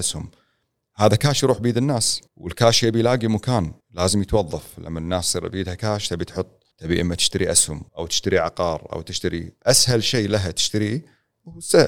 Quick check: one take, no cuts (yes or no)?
no